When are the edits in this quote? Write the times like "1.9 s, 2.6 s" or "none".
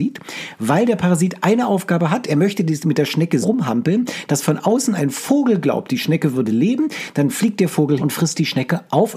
3.4 s, 8.0 s